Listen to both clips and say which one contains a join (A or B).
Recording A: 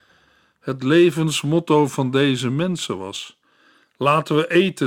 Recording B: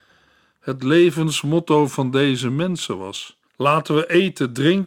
B